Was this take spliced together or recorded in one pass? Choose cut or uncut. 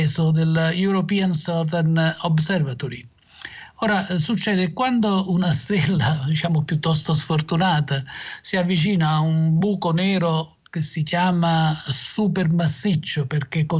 uncut